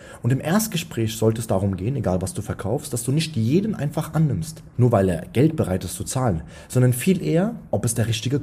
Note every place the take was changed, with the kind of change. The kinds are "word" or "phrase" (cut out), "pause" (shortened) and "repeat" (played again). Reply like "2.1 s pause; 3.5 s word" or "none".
4.7 s pause